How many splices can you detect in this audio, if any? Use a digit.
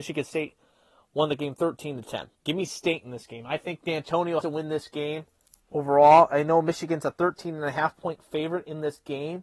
3